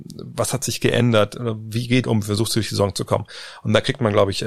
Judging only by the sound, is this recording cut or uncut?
cut